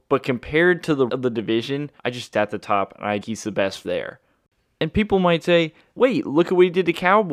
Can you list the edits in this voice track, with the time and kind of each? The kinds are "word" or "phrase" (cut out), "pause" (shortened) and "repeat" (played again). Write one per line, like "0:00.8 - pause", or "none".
0:01.1 - word
0:02.0 - pause
0:02.3 - phrase
0:03.2 - phrase
0:03.8 - word
0:06.0 - word